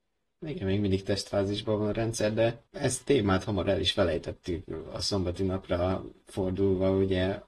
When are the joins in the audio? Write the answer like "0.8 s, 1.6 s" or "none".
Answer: 2.7 s